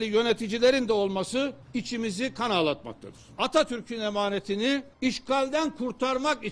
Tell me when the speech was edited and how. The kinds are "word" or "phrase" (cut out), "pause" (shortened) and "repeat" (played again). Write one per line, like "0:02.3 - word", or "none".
0:01.6 - pause